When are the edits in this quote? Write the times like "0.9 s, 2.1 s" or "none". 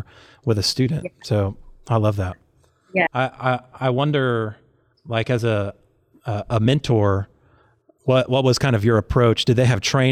none